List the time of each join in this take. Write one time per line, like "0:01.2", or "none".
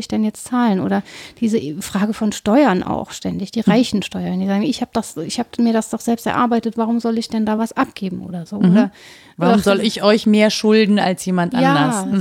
none